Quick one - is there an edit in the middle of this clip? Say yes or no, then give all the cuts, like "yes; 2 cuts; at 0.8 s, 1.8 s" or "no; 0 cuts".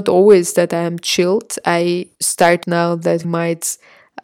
yes; 3 cuts; at 2.1 s, 2.6 s, 3.2 s